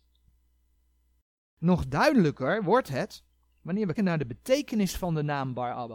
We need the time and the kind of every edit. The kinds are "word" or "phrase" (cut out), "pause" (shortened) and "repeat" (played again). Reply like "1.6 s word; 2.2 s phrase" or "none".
3.9 s word